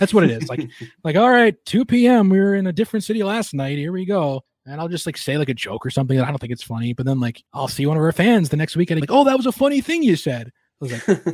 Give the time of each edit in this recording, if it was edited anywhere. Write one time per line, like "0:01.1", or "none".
0:04.5
0:07.5
0:09.0